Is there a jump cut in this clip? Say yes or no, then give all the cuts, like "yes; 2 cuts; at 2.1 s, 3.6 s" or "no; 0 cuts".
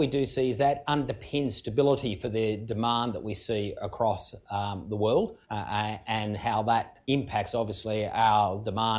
yes; 2 cuts; at 5.4 s, 7.0 s